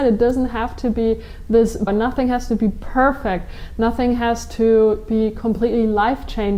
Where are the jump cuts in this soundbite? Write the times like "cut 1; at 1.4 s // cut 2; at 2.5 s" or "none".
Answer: cut 1; at 1.9 s